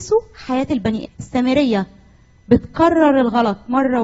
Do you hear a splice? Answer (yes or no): yes